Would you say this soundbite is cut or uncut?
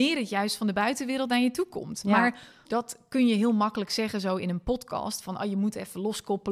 cut